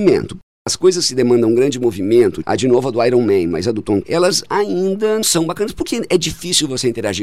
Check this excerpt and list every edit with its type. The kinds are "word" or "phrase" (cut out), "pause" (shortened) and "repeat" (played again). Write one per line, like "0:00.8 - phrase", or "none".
0:02.4 - word
0:04.0 - word
0:05.2 - word